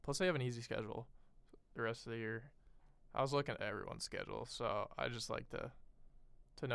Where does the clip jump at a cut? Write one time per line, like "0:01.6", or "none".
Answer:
none